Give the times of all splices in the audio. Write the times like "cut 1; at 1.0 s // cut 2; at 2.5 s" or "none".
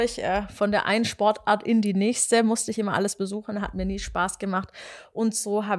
none